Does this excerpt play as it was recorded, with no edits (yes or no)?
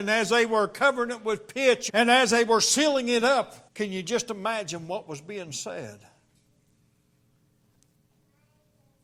no